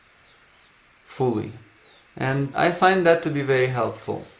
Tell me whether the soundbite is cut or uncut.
cut